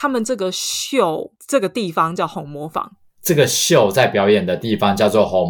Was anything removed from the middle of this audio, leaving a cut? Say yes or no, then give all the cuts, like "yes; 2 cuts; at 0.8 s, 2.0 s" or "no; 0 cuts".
no; 0 cuts